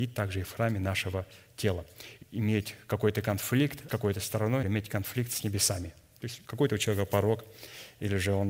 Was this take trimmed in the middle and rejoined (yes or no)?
yes